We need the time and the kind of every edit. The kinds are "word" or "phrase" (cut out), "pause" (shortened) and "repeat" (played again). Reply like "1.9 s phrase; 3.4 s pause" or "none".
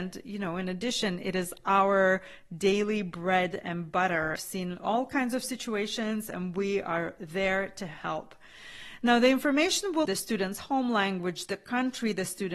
4.4 s phrase; 10.0 s word